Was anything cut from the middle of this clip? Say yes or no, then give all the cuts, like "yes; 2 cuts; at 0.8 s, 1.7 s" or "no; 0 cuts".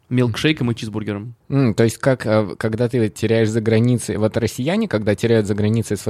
no; 0 cuts